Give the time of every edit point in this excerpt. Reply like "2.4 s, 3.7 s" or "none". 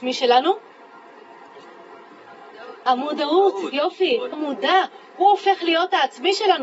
4.3 s